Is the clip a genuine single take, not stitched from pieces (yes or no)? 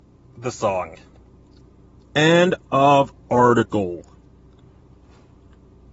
yes